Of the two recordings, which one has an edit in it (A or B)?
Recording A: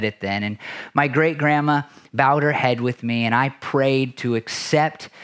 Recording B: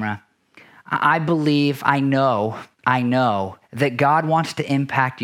B